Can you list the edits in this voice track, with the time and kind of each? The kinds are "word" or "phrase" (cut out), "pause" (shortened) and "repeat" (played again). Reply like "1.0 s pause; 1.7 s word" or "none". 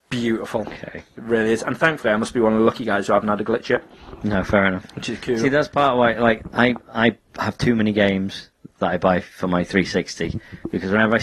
none